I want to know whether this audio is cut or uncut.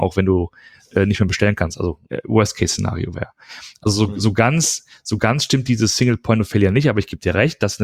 uncut